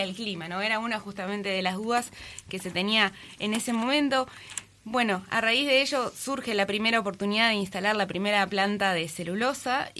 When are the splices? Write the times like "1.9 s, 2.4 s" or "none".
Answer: none